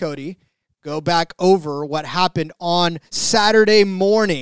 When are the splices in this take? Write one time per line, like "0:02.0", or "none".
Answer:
0:03.1